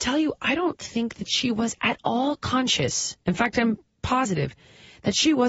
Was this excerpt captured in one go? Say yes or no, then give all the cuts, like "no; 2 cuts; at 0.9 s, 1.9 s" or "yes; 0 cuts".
no; 1 cut; at 3.2 s